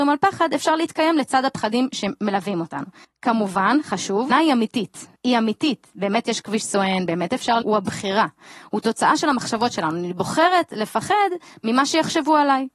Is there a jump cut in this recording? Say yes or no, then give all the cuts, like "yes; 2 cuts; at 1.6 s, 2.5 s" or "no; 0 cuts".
yes; 4 cuts; at 3.0 s, 4.3 s, 5.2 s, 7.6 s